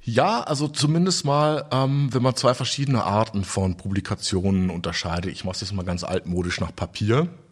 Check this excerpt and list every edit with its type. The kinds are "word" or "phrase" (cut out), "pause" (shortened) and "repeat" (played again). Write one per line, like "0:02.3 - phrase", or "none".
none